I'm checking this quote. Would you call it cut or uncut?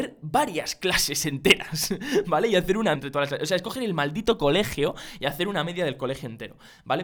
cut